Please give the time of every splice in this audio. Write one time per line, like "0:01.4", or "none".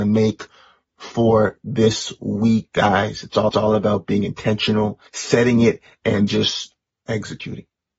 0:03.5
0:05.1
0:06.3